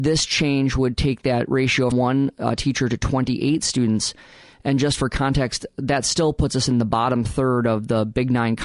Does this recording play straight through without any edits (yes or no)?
no